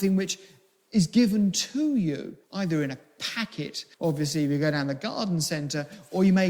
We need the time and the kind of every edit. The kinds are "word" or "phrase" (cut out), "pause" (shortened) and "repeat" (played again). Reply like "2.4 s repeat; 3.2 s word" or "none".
2.4 s pause; 3.9 s pause